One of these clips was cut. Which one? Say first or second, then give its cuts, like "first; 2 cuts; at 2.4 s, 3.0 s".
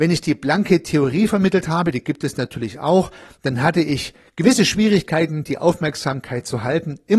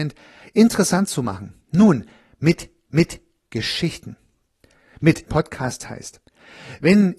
second; 2 cuts; at 2.9 s, 5.3 s